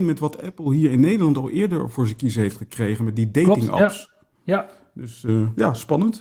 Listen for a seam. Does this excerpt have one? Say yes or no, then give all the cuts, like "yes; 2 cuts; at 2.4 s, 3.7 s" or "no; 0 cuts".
yes; 1 cut; at 4.3 s